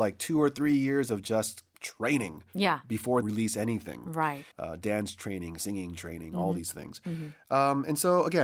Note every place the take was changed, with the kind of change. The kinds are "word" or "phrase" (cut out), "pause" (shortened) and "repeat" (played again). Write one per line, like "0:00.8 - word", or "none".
0:01.7 - pause
0:03.2 - phrase
0:04.5 - pause